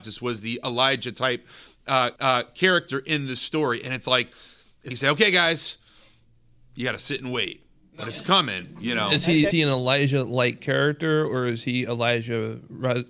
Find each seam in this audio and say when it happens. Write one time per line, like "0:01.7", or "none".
0:02.2
0:04.9
0:09.5

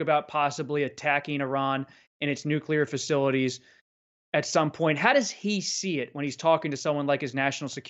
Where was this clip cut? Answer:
none

